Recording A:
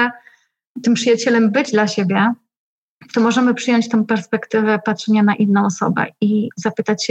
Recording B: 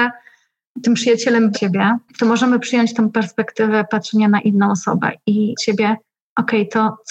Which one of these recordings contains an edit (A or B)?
B